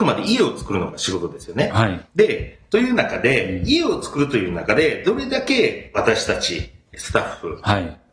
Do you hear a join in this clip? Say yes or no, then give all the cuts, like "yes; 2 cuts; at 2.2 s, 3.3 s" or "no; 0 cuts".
yes; 1 cut; at 2.1 s